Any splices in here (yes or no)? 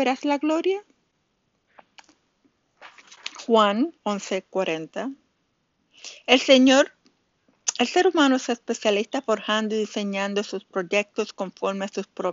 yes